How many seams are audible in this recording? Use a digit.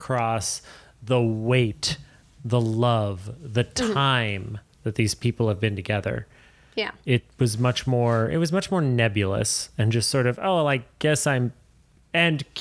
0